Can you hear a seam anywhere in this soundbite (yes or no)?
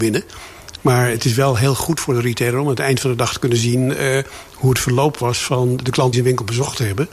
yes